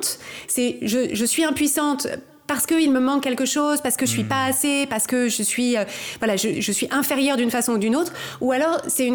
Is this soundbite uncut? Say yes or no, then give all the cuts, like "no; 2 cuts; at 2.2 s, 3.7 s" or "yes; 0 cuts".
no; 1 cut; at 6.5 s